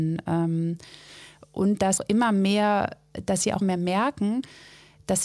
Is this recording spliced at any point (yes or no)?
yes